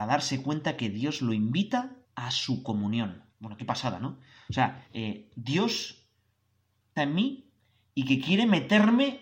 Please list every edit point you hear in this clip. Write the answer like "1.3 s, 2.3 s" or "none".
2.0 s, 3.3 s, 4.9 s, 7.0 s

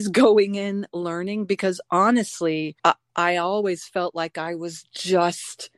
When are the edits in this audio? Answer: 2.8 s

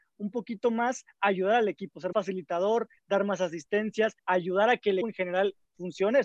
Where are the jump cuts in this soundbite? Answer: 2.1 s, 4.2 s, 5.0 s

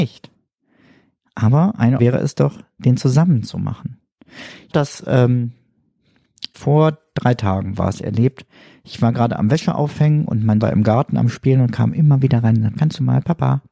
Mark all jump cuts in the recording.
2.0 s, 4.7 s, 6.5 s, 10.6 s, 12.8 s

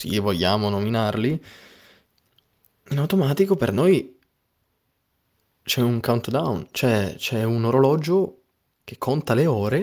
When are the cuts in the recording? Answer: none

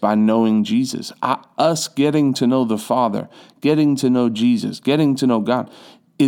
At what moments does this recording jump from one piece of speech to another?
none

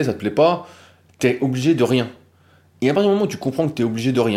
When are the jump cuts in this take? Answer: none

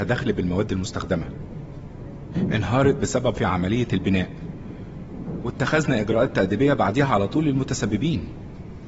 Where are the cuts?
3.3 s

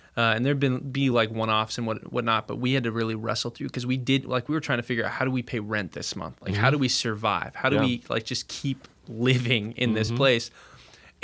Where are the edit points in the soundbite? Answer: none

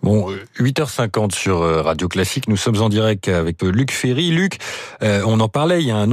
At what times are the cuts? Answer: 3.6 s

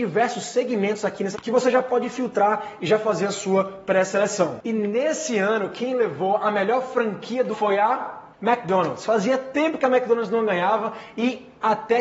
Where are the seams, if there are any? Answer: 1.3 s, 7.5 s, 8.3 s

